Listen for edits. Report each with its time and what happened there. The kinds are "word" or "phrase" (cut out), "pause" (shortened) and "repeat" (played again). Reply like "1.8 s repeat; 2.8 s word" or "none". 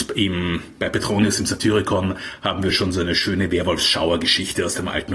none